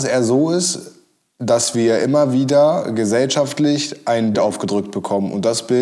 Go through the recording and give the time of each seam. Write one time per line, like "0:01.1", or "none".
0:04.3